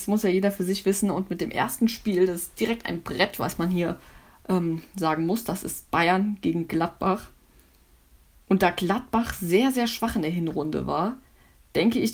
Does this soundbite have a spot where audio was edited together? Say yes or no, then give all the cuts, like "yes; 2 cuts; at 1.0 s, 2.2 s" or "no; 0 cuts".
no; 0 cuts